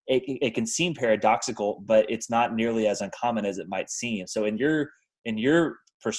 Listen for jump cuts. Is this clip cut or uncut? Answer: uncut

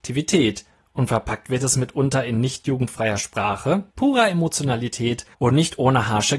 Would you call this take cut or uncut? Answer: cut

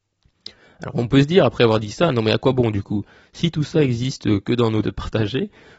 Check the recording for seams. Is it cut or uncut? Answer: cut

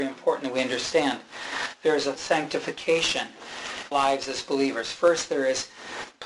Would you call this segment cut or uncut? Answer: cut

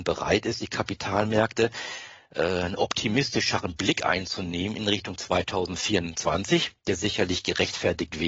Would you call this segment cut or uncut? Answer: uncut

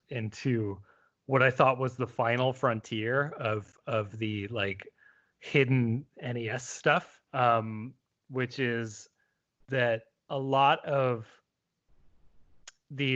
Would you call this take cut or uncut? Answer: cut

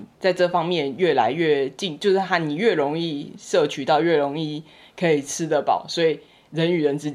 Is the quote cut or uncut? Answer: uncut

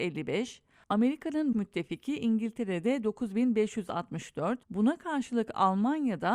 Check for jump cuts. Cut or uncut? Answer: cut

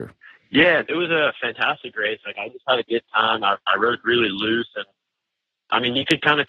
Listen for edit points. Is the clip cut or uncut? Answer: uncut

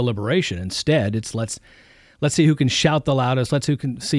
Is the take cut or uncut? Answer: uncut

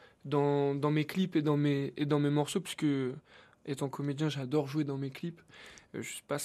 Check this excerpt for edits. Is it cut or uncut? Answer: uncut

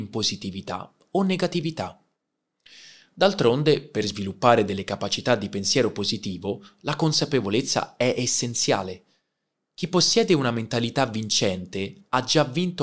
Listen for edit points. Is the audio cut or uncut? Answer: uncut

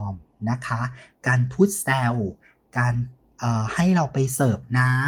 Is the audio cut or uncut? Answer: uncut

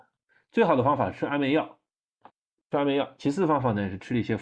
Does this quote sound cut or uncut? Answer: cut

